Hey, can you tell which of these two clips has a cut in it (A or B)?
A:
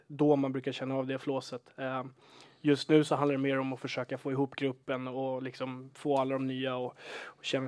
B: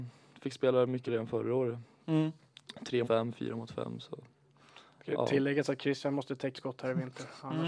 B